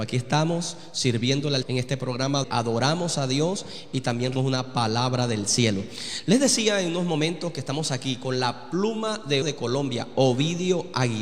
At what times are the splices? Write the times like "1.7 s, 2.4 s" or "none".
1.6 s, 2.4 s, 4.4 s, 9.4 s